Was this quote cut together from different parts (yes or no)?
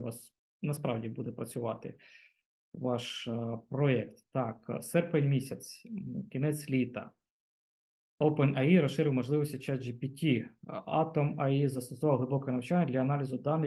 no